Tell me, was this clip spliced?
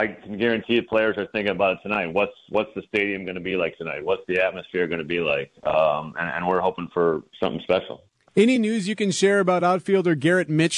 no; 0 cuts

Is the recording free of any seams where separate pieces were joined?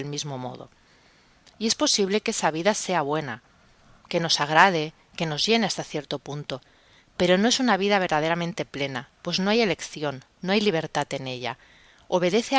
yes; 0 cuts

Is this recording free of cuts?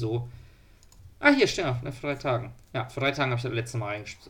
no; 1 cut; at 1.1 s

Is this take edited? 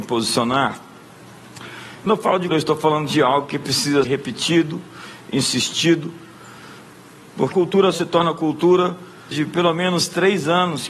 yes; 6 cuts; at 2.1 s, 2.5 s, 4.0 s, 7.5 s, 7.9 s, 9.3 s

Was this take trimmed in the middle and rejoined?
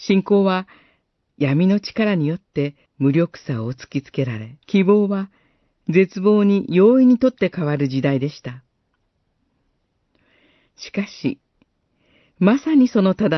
yes; 2 cuts; at 2.9 s, 4.6 s

